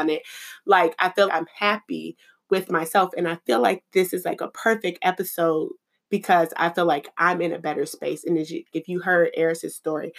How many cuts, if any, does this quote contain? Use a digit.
2